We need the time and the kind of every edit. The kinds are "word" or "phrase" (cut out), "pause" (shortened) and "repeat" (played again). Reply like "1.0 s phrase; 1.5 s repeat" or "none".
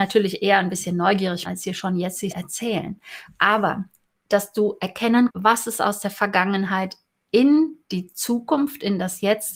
1.4 s word; 2.3 s word; 5.3 s word